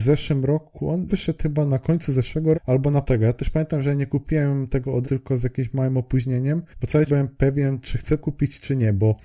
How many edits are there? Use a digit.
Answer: 7